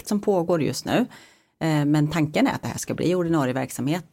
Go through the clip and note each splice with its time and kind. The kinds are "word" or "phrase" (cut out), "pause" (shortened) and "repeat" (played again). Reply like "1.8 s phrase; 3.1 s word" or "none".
none